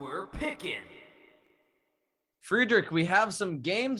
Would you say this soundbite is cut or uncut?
uncut